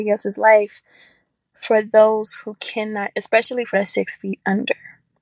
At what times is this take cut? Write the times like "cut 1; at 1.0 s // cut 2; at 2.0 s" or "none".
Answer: cut 1; at 3.1 s // cut 2; at 3.7 s